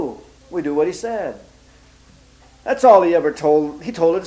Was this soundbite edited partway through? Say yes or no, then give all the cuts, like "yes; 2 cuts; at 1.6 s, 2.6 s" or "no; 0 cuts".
yes; 1 cut; at 1.7 s